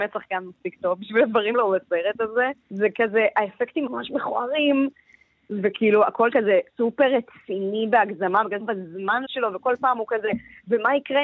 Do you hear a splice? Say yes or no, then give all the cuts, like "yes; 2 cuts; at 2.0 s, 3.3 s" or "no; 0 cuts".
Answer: yes; 7 cuts; at 1.5 s, 2.6 s, 3.9 s, 6.3 s, 6.7 s, 8.6 s, 9.2 s